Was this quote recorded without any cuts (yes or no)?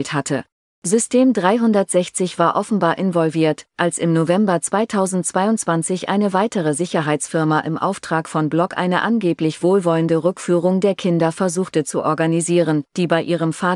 yes